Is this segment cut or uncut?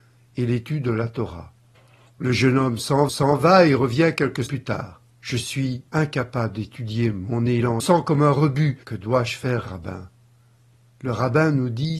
cut